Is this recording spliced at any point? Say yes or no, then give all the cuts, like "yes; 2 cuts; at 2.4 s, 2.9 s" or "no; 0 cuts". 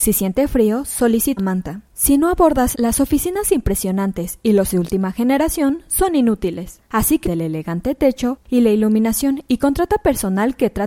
yes; 6 cuts; at 1.4 s, 1.9 s, 2.7 s, 4.7 s, 6.8 s, 7.2 s